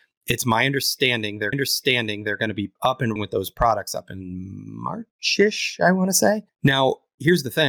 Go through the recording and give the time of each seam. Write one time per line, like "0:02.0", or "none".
0:01.5
0:02.8
0:03.2
0:06.5